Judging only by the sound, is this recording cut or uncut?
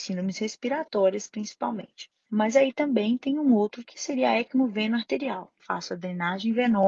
cut